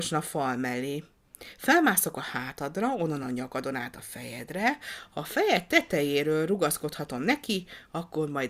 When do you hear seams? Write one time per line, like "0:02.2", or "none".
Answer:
none